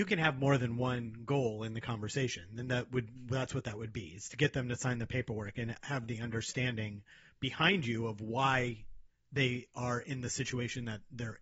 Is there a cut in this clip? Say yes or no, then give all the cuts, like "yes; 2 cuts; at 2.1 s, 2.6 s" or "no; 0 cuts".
no; 0 cuts